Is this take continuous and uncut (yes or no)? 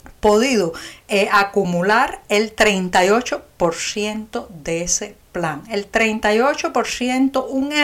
yes